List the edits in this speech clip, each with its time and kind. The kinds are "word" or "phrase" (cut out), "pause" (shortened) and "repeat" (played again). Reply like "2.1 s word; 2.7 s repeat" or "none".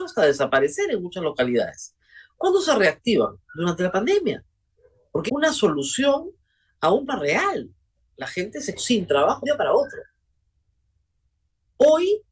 5.3 s word; 7.1 s word; 8.8 s word; 9.4 s word

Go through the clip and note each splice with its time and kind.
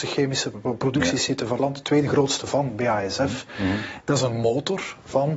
1.6 s word

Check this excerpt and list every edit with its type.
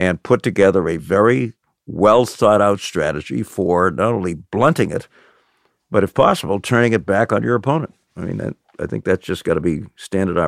none

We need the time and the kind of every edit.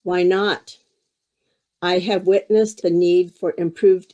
2.8 s phrase

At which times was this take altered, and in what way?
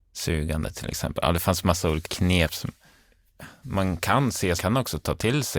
2.0 s word; 4.6 s phrase

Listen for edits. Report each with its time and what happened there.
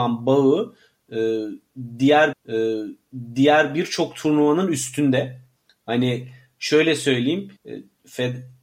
2.3 s repeat; 5.6 s pause; 7.6 s pause

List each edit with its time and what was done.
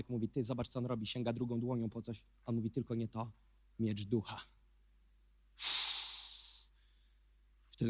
none

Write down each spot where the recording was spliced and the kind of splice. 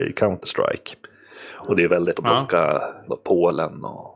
2.1 s word; 3.1 s word

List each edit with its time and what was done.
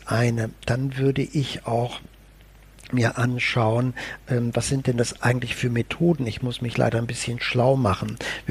none

